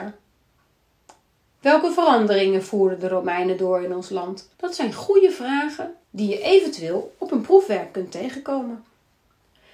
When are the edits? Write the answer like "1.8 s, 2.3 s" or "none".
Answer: 4.5 s, 6.0 s